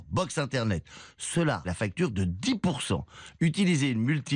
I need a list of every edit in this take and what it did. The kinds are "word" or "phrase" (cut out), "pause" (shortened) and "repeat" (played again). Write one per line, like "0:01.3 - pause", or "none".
0:01.6 - word

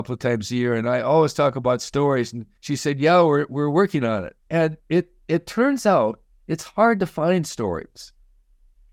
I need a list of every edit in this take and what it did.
0:02.6 - pause
0:04.4 - pause

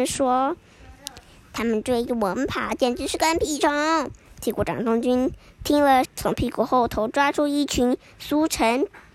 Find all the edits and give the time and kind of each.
0:00.9 - pause
0:06.0 - phrase

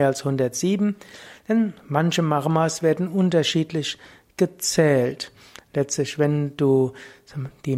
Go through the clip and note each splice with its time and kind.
none

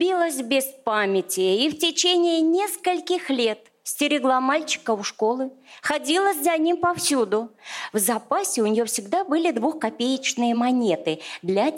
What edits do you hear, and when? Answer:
none

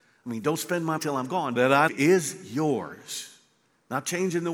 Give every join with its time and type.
0:01.0 - word
0:01.6 - phrase
0:01.9 - word

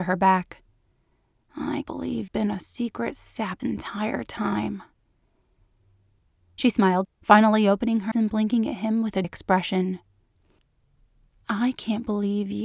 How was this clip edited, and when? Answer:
0:01.8 - word
0:02.3 - word
0:03.6 - word
0:07.0 - word
0:08.1 - word
0:09.2 - word

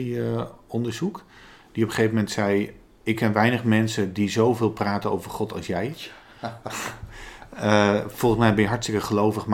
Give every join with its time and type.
none

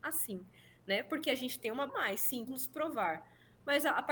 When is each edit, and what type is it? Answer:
0:01.9 - word
0:02.5 - word

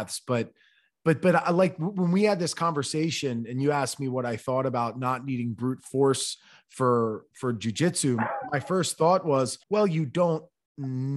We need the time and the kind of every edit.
0:09.6 - pause

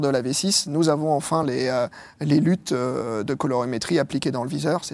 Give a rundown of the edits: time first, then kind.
none

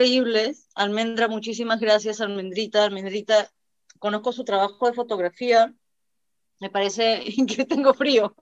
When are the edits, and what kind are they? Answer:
none

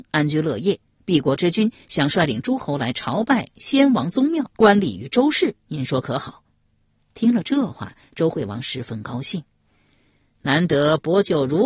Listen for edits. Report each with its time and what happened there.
0:04.5 - pause

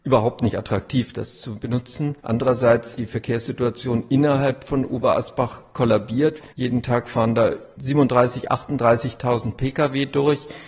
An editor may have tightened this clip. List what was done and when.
0:02.2 - pause
0:06.5 - pause

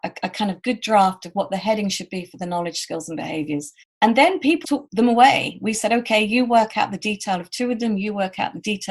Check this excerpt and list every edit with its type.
0:03.8 - pause
0:04.6 - word

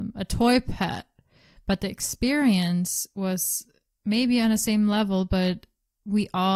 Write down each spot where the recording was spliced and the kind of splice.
none

